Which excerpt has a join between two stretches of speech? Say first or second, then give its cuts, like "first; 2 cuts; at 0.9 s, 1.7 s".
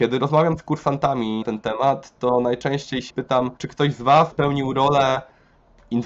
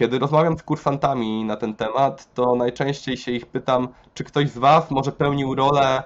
first; 4 cuts; at 1.4 s, 3.1 s, 3.6 s, 4.3 s